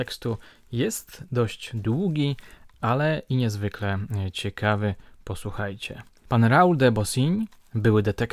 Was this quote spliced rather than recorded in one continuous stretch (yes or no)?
no